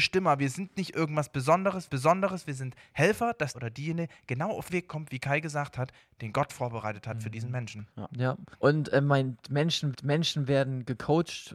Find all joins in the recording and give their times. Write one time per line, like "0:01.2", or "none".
0:01.9
0:03.5
0:04.7
0:07.9
0:08.5
0:09.9